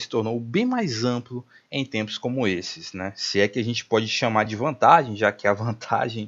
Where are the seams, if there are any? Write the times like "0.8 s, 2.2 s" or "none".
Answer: none